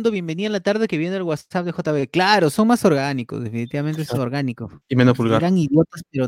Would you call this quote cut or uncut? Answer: cut